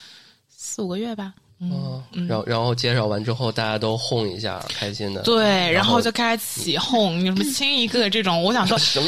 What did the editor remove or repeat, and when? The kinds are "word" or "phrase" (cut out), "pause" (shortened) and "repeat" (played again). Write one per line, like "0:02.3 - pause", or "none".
none